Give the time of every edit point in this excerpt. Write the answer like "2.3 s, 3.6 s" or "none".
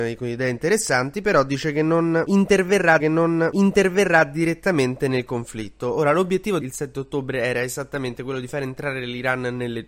3.0 s, 6.6 s

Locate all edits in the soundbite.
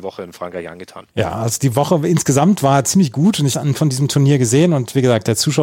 1.1 s, 3.5 s

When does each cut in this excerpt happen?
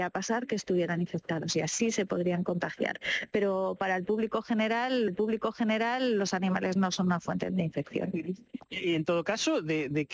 5.1 s, 7.5 s

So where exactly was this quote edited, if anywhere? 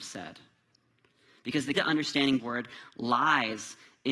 1.8 s, 2.4 s

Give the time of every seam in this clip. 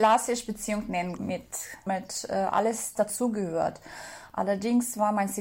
1.2 s, 1.9 s, 3.0 s

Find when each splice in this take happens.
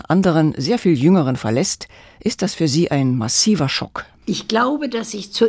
1.4 s

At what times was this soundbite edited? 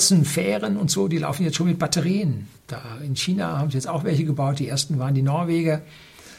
2.6 s

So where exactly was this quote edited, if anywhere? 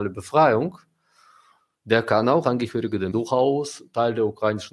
2.4 s, 3.1 s

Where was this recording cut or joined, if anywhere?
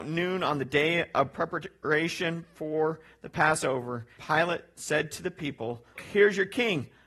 4.2 s, 6.0 s

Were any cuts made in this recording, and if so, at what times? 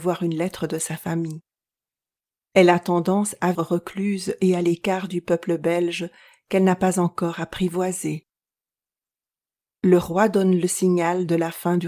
3.5 s

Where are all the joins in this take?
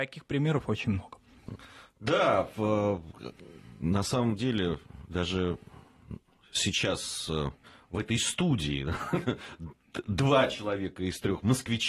none

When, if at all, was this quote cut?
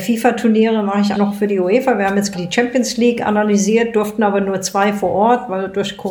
1.1 s, 2.3 s

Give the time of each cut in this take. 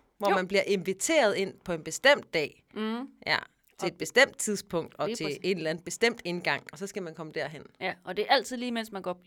none

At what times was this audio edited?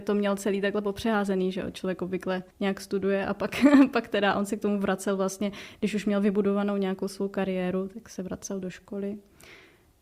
2.5 s

